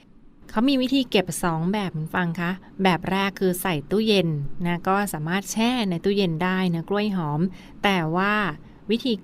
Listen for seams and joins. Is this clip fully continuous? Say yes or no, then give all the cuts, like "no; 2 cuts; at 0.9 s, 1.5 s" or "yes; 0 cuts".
yes; 0 cuts